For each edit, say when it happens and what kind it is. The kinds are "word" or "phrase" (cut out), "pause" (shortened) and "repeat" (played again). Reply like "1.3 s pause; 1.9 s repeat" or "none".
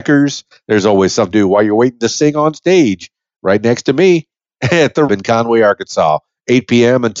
1.3 s word; 5.1 s word